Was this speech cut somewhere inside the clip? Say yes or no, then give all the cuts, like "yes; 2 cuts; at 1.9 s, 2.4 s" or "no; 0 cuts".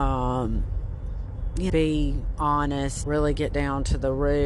yes; 2 cuts; at 1.7 s, 3.0 s